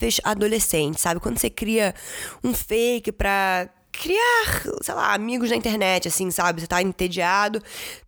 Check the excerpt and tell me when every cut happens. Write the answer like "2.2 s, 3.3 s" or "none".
none

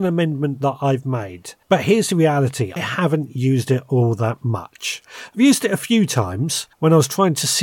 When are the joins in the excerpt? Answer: 1.6 s, 2.8 s, 6.7 s

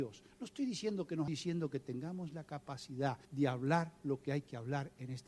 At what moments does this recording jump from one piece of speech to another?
1.3 s, 3.2 s

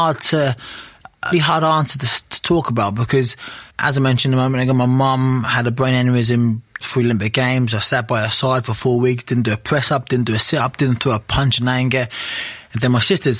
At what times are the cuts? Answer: 1.3 s, 3.7 s, 6.8 s

